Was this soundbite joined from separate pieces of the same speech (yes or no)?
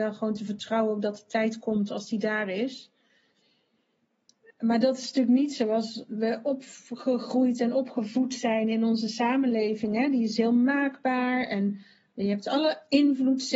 no